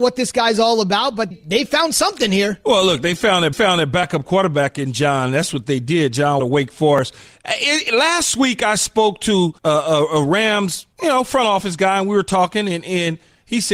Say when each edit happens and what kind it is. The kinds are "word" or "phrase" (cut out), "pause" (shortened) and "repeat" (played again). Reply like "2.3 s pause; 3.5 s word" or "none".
1.3 s word; 3.5 s repeat; 6.4 s phrase; 9.6 s pause; 10.9 s pause